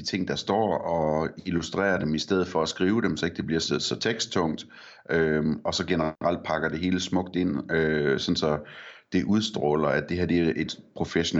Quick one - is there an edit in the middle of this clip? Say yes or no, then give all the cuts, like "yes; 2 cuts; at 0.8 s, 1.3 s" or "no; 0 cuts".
no; 0 cuts